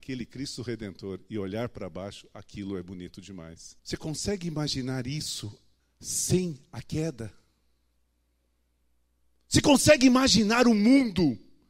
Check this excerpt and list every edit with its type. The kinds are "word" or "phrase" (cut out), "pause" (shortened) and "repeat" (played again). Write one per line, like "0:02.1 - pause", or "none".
0:03.8 - pause
0:05.8 - pause

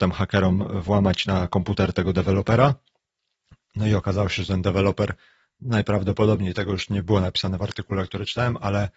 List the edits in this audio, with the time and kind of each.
none

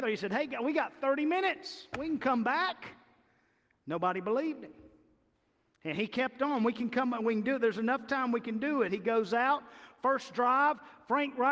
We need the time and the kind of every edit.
none

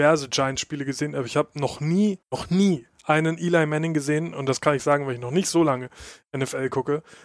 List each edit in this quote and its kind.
0:02.2 - pause

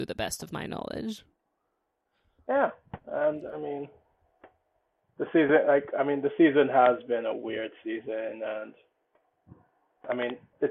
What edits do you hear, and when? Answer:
none

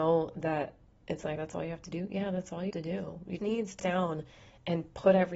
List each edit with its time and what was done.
0:01.4 - word
0:02.7 - word
0:03.4 - word
0:03.8 - word

